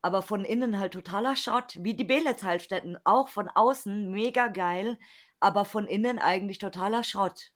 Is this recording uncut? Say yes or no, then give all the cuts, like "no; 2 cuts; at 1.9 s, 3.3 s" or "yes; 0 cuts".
yes; 0 cuts